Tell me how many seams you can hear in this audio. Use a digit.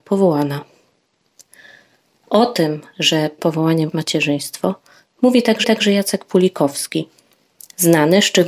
3